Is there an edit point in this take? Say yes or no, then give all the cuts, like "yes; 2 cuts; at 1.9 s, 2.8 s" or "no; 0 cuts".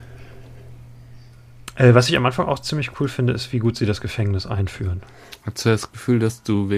no; 0 cuts